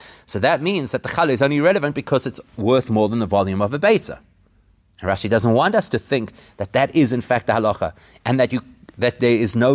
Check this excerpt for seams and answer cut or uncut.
uncut